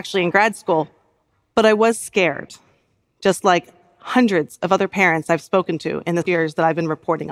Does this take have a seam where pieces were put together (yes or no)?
no